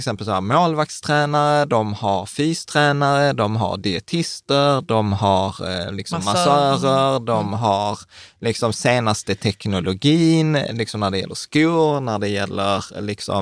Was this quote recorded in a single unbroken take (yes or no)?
yes